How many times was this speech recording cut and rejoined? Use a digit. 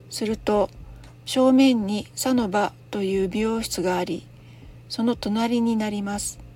1